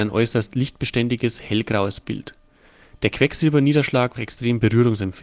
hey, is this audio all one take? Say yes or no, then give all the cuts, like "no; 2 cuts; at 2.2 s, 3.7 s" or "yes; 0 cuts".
no; 1 cut; at 4.2 s